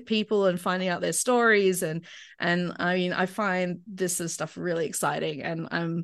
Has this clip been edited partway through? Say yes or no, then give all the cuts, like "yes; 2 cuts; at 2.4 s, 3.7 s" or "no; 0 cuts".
no; 0 cuts